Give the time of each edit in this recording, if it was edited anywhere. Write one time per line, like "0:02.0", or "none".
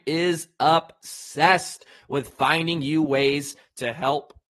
none